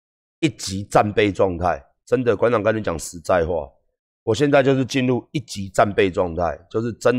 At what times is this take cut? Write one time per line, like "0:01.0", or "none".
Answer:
none